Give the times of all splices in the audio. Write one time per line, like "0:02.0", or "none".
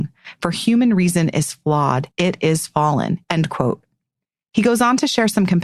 0:02.1
0:03.2